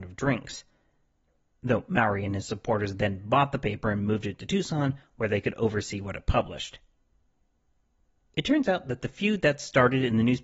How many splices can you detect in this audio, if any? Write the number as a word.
zero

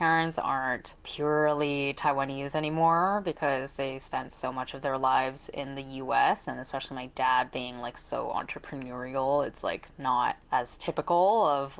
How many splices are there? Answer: zero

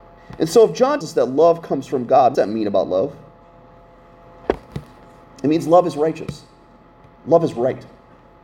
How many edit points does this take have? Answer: two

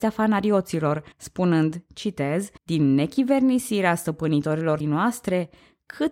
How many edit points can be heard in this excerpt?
three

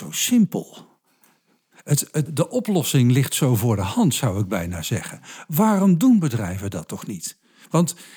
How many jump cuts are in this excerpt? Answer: one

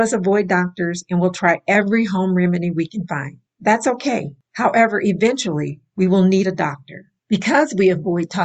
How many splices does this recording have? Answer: one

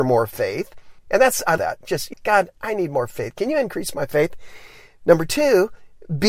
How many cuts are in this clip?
three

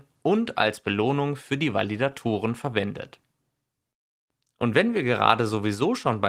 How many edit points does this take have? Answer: zero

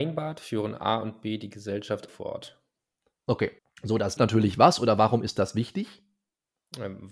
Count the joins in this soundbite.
three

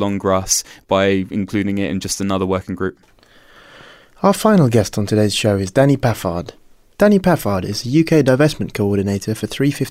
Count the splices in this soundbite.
zero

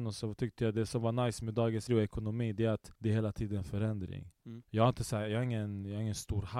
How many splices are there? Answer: three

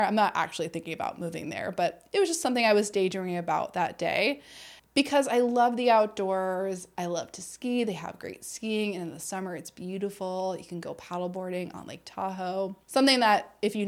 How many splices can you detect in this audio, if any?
two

